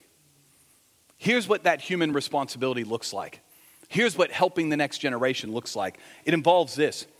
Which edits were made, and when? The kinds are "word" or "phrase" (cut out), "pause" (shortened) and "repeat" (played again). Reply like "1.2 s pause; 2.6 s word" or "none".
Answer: none